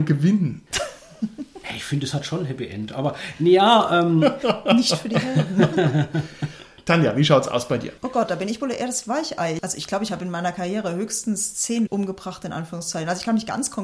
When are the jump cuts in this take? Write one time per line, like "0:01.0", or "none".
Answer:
0:11.9